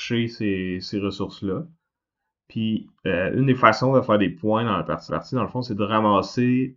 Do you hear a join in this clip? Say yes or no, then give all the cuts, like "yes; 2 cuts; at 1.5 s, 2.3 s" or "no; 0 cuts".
yes; 1 cut; at 5.1 s